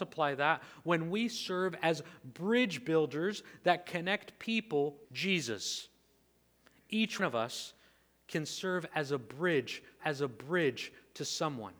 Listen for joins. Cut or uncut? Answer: cut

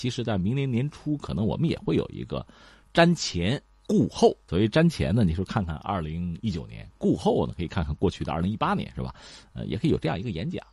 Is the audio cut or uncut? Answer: uncut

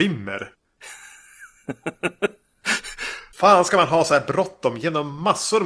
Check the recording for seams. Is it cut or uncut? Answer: uncut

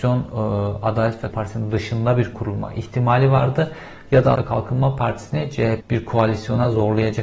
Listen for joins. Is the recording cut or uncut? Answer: cut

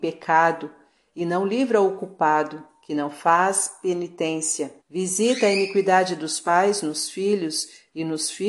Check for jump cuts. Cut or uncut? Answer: cut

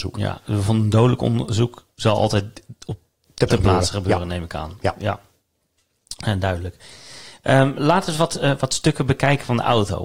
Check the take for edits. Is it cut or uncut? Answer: cut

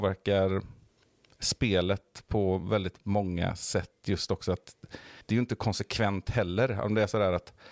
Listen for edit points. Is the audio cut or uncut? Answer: cut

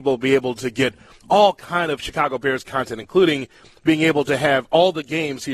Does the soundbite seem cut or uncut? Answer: uncut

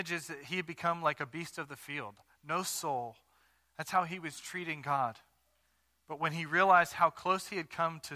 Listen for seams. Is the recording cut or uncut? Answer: uncut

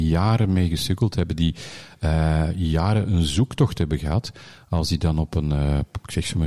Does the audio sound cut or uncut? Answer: uncut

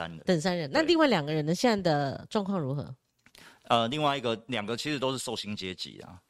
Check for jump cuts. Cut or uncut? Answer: uncut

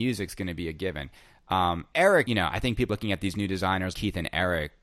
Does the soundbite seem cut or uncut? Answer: cut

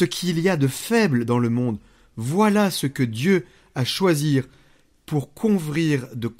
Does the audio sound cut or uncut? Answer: uncut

